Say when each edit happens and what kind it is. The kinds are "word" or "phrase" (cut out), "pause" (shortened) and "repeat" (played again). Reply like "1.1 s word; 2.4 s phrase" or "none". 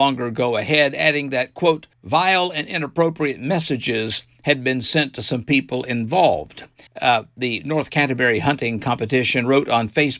1.9 s pause; 6.9 s pause